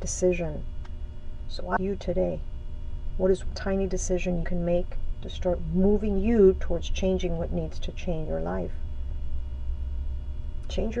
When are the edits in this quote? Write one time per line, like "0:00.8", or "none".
0:01.8
0:03.5
0:04.4
0:05.2
0:08.3